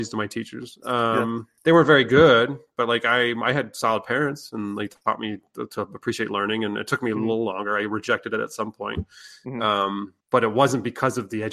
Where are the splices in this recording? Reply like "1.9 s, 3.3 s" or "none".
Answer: 1.6 s, 10.2 s